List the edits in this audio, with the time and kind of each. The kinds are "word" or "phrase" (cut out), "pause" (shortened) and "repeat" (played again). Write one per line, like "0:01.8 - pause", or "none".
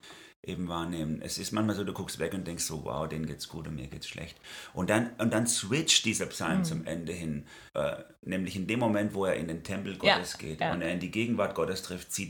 0:07.7 - pause

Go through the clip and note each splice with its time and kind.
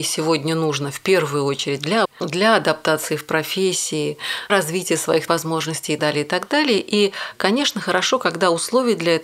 0:02.0 - word
0:04.5 - word
0:05.3 - word
0:06.0 - word

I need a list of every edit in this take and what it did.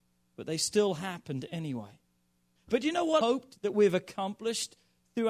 0:03.2 - word

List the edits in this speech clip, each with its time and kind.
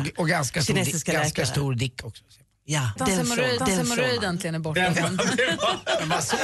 0:03.0 - phrase
0:03.6 - repeat
0:04.9 - word

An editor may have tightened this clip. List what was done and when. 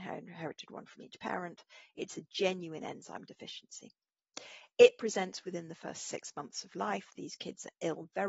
none

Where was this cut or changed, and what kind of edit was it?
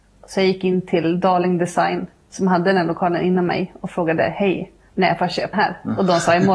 0:05.5 - word

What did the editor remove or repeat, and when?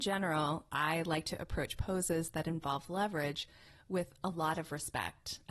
none

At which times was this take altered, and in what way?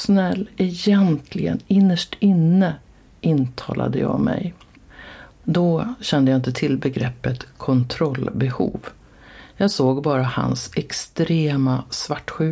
none

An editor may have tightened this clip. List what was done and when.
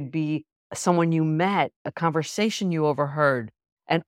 0:01.8 - pause

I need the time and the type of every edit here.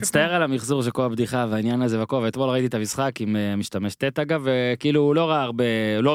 none

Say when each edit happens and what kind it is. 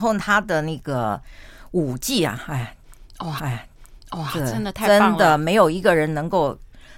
0:03.4 - repeat

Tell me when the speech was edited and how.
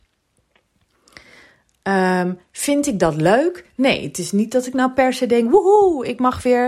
none

